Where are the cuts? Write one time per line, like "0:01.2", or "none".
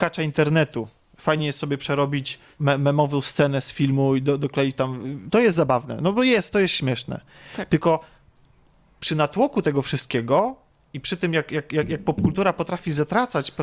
none